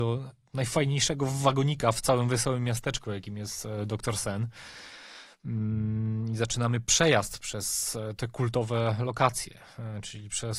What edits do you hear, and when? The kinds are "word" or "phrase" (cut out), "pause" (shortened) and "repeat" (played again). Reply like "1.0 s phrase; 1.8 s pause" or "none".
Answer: none